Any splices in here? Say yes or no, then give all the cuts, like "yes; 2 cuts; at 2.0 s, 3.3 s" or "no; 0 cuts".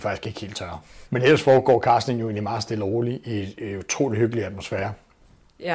yes; 1 cut; at 1.1 s